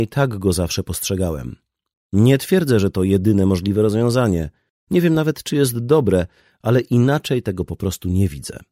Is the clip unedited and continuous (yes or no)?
yes